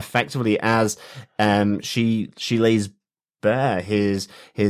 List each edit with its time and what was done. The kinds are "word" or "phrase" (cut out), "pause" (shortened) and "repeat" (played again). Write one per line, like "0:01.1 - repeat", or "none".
none